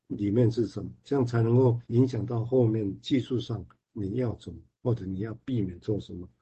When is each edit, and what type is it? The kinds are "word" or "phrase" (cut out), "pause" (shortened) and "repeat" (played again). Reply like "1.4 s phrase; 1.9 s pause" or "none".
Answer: 1.8 s pause

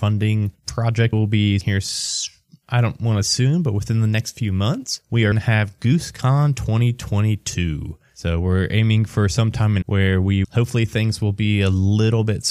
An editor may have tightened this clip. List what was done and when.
1.1 s word; 1.6 s word; 3.2 s word; 5.3 s word; 9.8 s word; 10.4 s word

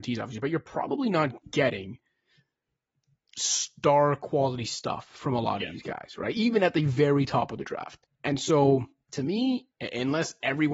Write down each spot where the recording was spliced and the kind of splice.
1.4 s pause

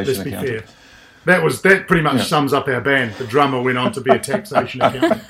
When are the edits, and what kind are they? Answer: none

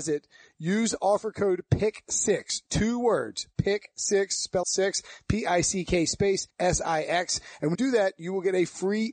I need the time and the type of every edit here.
4.6 s word; 6.5 s pause; 7.7 s word

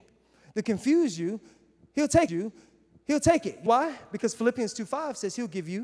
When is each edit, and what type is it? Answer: 2.3 s repeat; 3.7 s word

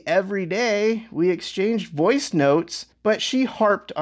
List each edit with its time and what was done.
2.9 s pause

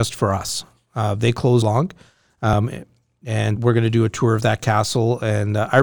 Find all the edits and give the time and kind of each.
1.6 s phrase; 3.6 s word

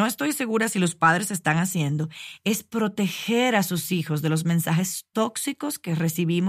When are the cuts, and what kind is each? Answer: none

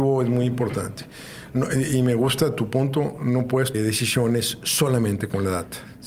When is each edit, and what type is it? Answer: 3.7 s phrase

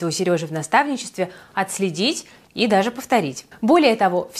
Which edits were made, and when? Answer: none

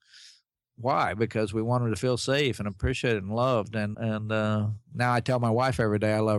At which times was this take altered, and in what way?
3.9 s word; 4.8 s pause

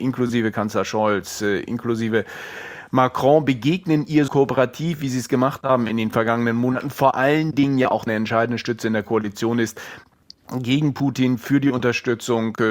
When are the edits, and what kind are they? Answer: 4.3 s word; 8.1 s phrase

